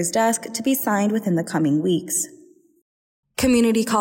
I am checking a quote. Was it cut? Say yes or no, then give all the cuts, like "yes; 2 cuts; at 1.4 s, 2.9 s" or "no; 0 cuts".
no; 0 cuts